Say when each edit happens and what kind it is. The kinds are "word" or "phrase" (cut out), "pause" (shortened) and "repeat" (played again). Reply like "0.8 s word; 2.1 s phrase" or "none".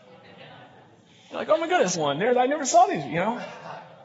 1.9 s word